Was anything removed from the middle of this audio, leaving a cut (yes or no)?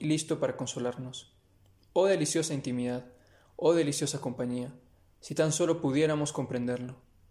no